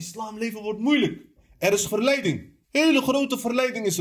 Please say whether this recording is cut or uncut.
cut